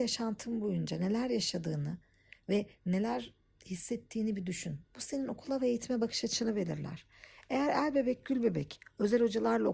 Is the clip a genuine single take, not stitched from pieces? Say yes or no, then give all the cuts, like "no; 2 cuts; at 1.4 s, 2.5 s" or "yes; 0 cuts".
yes; 0 cuts